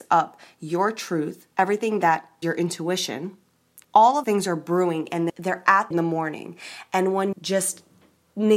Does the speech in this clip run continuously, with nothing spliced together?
no; 7 cuts; at 1.5 s, 2.4 s, 3.8 s, 4.2 s, 5.3 s, 5.9 s, 7.3 s

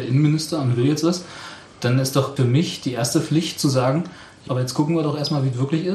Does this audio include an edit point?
yes; 2 cuts; at 2.4 s, 4.5 s

